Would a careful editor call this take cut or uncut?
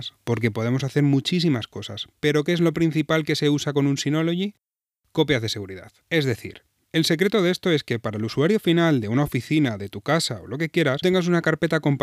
cut